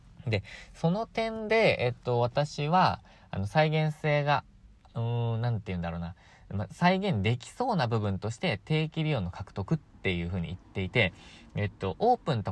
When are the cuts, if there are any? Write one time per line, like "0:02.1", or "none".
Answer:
none

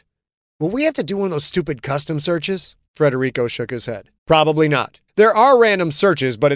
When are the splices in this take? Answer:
0:02.9
0:04.2
0:05.1

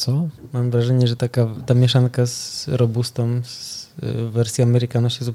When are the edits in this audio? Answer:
none

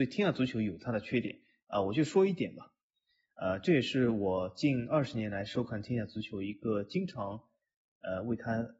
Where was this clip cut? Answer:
none

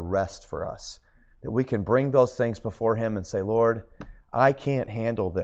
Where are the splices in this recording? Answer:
none

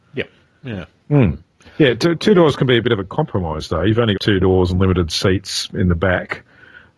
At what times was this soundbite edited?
0:04.1

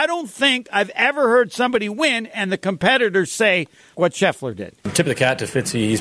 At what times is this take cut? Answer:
0:03.9

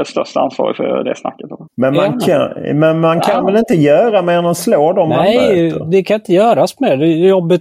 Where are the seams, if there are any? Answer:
0:01.7

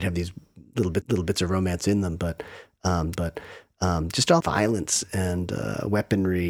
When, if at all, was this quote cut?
0:01.0
0:03.1
0:04.4

